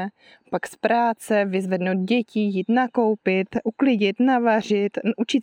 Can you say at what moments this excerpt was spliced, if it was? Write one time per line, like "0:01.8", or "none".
none